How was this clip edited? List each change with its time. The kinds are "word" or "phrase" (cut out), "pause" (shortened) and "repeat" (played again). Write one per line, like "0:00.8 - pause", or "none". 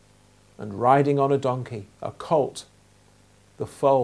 0:01.9 - pause